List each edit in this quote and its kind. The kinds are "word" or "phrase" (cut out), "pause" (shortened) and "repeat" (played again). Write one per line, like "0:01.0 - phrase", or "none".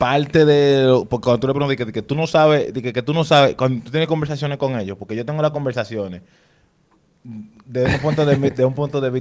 none